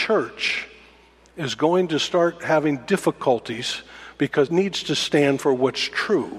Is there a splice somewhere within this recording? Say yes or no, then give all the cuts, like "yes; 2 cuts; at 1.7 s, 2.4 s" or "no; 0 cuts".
yes; 1 cut; at 4.5 s